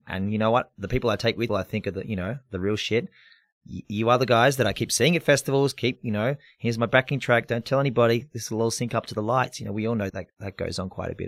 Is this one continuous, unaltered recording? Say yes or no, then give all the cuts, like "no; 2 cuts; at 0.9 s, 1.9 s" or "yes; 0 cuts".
no; 2 cuts; at 1.5 s, 10.1 s